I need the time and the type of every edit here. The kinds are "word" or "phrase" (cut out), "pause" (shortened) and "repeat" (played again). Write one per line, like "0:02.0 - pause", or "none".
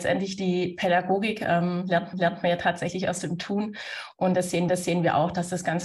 0:02.1 - repeat
0:04.7 - repeat